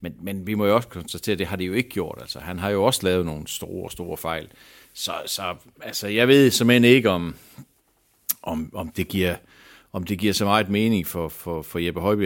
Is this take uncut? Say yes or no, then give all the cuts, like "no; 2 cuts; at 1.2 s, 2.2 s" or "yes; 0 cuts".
yes; 0 cuts